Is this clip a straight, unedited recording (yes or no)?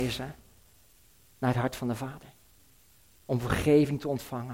yes